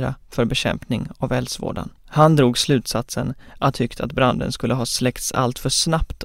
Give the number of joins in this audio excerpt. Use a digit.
2